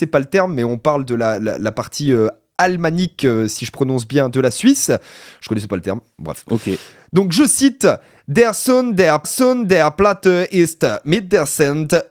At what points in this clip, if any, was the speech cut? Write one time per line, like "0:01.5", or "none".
0:09.2